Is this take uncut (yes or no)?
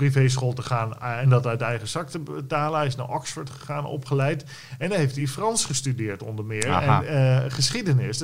yes